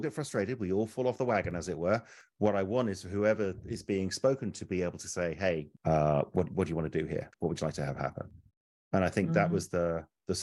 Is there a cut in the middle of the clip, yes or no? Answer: no